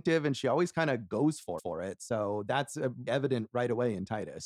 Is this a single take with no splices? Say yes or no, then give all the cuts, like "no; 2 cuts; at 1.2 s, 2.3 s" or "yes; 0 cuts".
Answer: no; 2 cuts; at 1.6 s, 3.1 s